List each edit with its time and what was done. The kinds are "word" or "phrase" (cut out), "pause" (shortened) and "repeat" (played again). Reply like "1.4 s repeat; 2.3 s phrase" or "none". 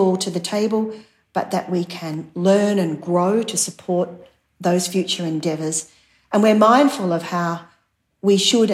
none